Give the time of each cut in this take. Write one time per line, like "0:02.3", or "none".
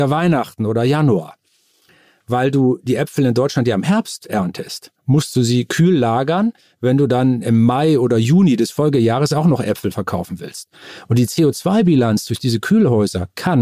none